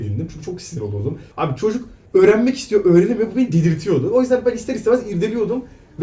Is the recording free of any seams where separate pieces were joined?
no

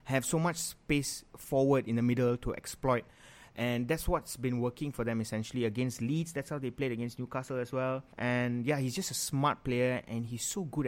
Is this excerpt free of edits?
no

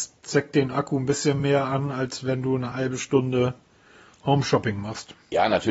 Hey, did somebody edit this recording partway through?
no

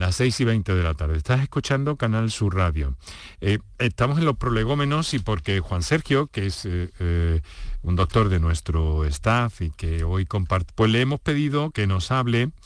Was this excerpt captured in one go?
no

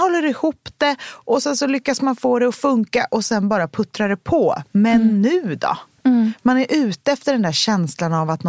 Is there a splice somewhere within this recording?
no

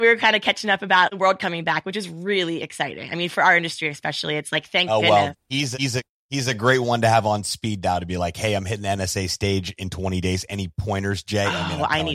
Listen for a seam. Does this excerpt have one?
no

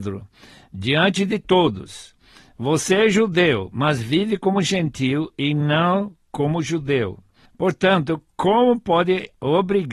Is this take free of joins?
yes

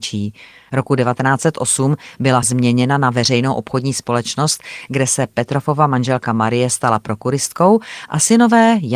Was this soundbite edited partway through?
yes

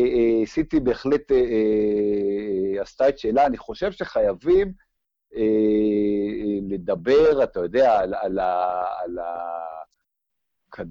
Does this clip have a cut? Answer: no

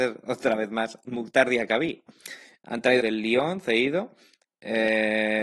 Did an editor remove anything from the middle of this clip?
yes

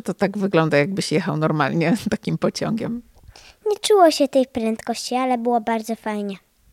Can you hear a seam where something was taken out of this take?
no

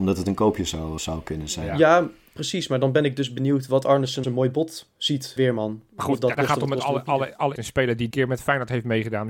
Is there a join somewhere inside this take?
yes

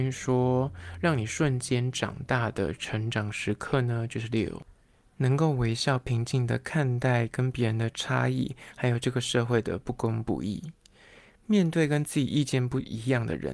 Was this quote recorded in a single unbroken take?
yes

